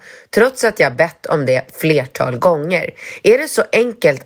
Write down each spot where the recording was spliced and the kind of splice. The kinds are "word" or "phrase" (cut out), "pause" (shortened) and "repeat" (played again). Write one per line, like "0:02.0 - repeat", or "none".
none